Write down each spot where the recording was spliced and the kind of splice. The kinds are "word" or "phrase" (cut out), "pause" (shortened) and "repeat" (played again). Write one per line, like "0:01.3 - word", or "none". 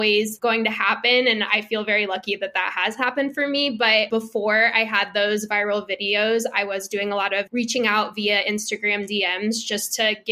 none